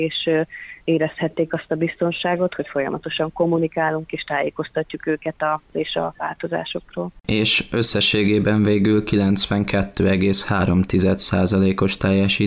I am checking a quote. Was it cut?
yes; 2 cuts; at 4.1 s, 5.7 s

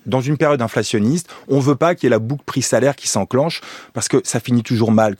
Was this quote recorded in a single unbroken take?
yes; 0 cuts

